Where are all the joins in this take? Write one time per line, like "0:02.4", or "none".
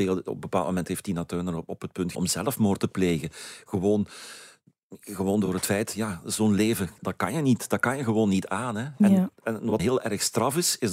0:02.1
0:07.0
0:09.8